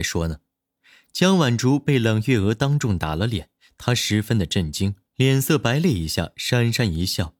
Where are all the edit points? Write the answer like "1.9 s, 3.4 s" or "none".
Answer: 5.1 s